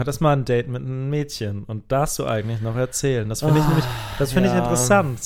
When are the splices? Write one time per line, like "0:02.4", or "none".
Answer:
0:02.2